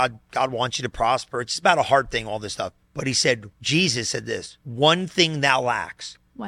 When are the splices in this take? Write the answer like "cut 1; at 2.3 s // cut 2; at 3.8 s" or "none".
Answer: cut 1; at 2.8 s // cut 2; at 3.5 s // cut 3; at 4.6 s